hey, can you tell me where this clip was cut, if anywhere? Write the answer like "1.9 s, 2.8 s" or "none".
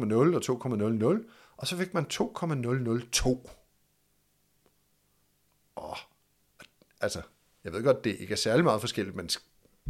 none